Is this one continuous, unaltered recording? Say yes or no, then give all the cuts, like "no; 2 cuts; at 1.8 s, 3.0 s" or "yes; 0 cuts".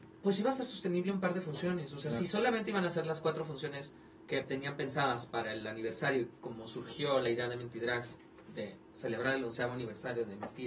yes; 0 cuts